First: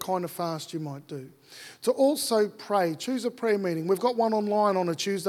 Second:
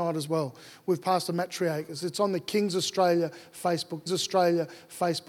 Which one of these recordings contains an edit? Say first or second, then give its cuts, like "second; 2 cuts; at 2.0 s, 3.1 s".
second; 1 cut; at 4.1 s